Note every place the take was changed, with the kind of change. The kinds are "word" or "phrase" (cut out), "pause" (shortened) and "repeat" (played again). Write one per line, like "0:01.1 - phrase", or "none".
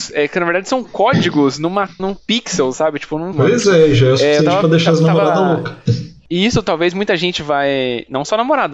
0:02.0 - word
0:03.3 - word

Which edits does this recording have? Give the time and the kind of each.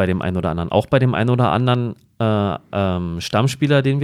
none

